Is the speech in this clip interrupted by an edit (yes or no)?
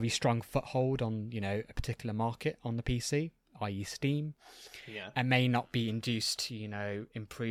no